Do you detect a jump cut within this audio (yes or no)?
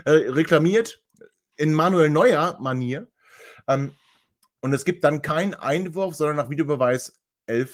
no